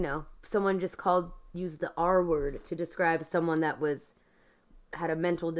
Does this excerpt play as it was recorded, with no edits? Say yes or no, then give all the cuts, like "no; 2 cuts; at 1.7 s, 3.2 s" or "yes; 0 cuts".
yes; 0 cuts